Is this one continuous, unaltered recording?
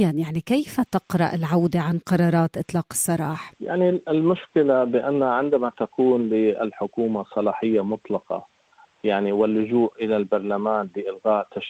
yes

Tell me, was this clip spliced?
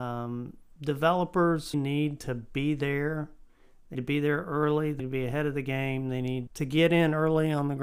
yes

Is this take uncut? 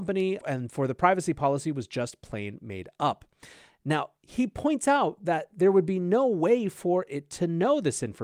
yes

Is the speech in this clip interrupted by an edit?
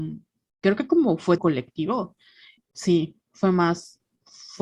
yes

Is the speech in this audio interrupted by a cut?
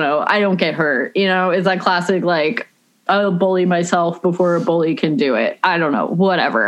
no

